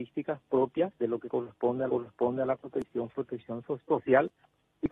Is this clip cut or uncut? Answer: cut